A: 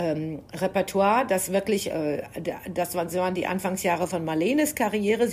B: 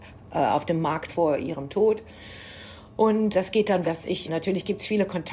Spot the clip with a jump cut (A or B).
B